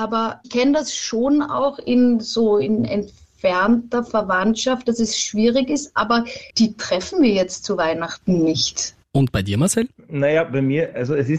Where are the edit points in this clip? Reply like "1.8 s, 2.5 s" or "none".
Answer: 6.5 s